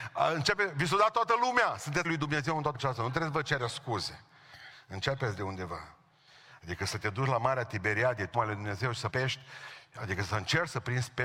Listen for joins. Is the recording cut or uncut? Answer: cut